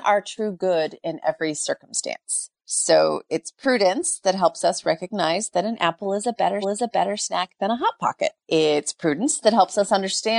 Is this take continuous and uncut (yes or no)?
no